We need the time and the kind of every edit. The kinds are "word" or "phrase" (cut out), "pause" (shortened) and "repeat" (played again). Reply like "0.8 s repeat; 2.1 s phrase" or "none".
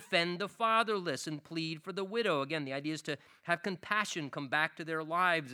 none

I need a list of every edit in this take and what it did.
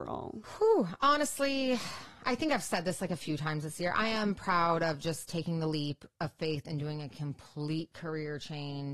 6.1 s pause

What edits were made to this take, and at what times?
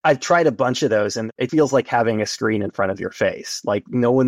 1.5 s word

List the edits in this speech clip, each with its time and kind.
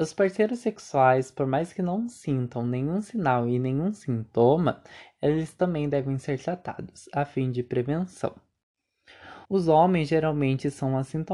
9.4 s pause

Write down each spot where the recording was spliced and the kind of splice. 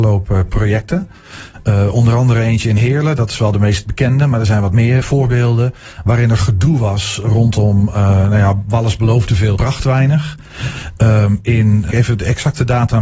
5.0 s word; 9.6 s word; 11.9 s word

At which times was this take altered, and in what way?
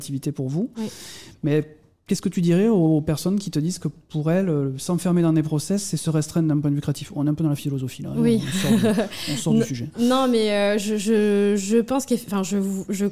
none

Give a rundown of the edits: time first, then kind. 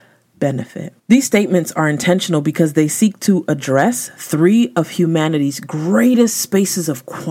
1.0 s pause

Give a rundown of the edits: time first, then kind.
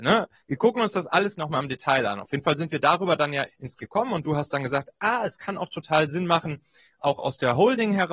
1.4 s word; 3.5 s word; 3.8 s word

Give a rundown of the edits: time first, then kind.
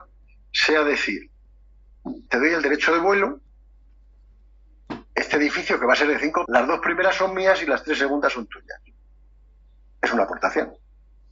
2.3 s word; 6.5 s word

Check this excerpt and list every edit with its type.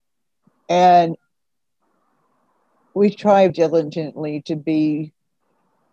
3.5 s word

